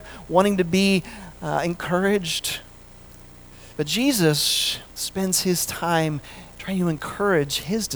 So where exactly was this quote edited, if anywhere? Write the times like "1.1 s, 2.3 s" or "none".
3.7 s, 4.9 s